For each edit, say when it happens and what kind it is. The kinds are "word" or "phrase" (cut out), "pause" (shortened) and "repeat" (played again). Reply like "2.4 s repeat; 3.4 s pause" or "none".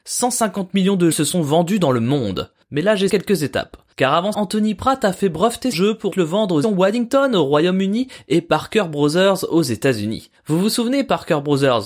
1.1 s word; 3.1 s word; 4.3 s word; 5.7 s word; 6.1 s word; 6.6 s word